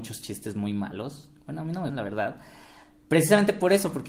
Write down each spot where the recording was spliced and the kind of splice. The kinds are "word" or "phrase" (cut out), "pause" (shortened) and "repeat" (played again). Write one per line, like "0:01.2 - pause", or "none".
0:01.9 - word